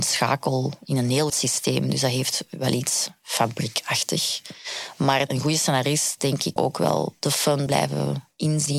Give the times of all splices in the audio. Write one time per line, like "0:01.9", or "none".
0:01.3
0:06.6
0:07.7